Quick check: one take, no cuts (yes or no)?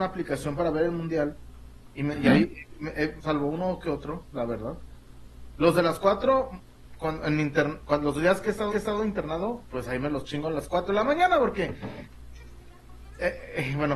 no